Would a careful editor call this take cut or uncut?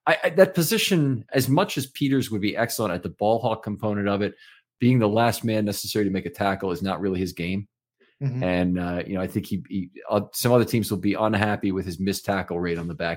uncut